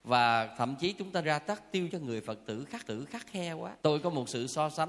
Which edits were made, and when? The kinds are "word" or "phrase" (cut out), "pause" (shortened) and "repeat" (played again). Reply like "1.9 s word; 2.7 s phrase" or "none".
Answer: 1.2 s word; 1.9 s word; 2.8 s repeat; 3.8 s pause